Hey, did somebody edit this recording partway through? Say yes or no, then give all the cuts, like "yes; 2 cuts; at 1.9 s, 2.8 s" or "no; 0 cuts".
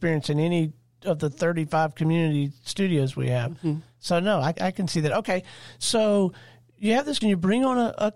yes; 2 cuts; at 4.5 s, 7.2 s